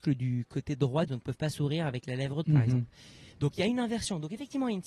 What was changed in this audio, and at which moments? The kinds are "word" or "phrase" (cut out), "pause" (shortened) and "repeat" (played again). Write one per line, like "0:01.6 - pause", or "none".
0:01.1 - word
0:02.4 - word